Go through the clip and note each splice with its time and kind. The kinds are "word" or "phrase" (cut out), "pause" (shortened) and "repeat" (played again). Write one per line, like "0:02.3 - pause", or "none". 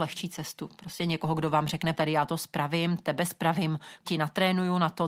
0:01.9 - word
0:04.0 - word